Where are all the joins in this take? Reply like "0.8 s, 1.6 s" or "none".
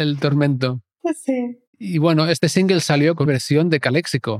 1.7 s, 3.2 s